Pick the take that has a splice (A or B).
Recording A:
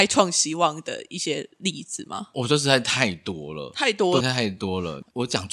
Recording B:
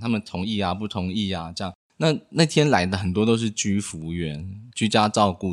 A